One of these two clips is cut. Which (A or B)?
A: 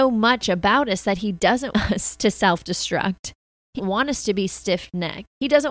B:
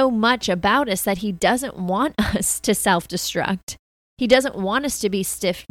A